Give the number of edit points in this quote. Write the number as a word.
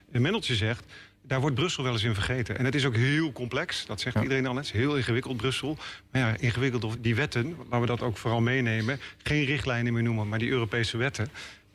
one